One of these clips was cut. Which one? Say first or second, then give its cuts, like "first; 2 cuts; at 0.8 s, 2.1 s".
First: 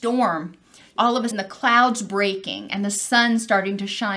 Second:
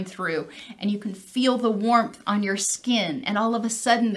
first; 2 cuts; at 1.0 s, 1.3 s